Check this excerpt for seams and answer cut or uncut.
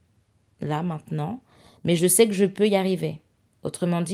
uncut